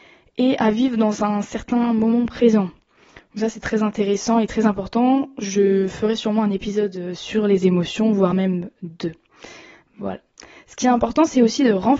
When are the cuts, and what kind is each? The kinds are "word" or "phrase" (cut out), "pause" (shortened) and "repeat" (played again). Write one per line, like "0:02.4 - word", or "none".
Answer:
none

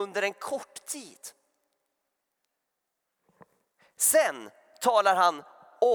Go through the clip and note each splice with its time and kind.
none

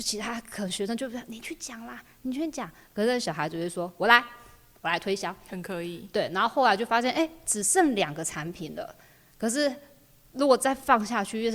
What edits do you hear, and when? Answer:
none

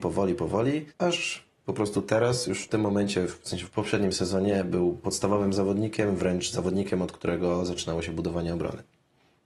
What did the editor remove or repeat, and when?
0:00.9 - pause

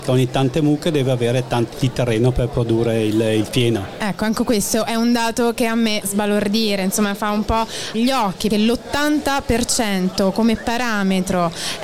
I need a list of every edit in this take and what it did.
0:01.7 - word
0:06.0 - word
0:07.9 - word
0:08.5 - word

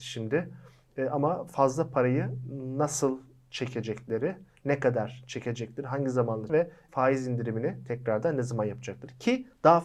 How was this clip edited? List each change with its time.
0:06.5 - word
0:06.9 - word

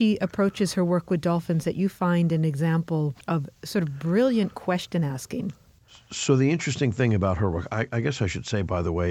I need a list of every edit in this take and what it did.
0:03.2 - pause
0:05.9 - pause

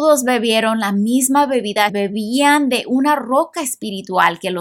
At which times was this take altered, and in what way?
0:01.9 - phrase

